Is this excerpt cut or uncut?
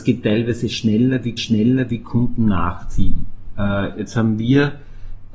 cut